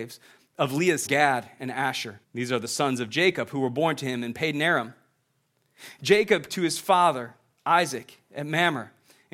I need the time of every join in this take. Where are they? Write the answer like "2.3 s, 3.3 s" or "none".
1.1 s, 2.2 s, 6.5 s